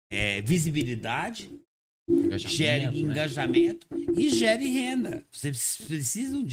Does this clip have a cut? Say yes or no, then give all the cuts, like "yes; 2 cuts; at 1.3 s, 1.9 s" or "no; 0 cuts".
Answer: no; 0 cuts